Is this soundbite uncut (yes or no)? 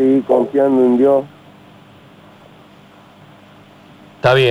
yes